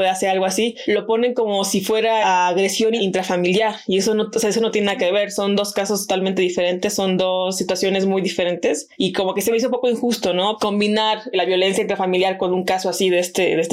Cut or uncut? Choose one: uncut